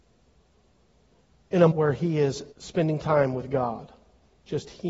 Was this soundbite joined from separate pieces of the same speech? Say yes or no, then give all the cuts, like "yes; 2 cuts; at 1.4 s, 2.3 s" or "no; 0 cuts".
yes; 2 cuts; at 1.7 s, 2.5 s